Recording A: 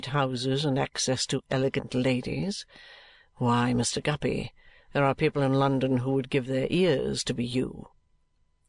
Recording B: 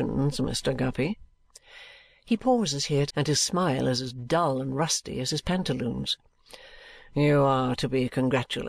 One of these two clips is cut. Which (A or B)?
B